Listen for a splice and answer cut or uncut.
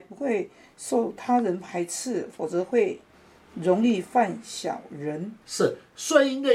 cut